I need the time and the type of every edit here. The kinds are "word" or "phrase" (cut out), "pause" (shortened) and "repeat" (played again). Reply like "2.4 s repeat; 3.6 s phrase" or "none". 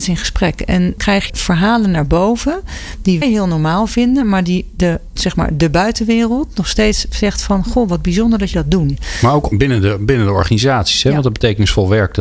1.0 s word; 1.3 s word; 3.2 s word; 5.2 s word; 8.5 s word; 9.5 s word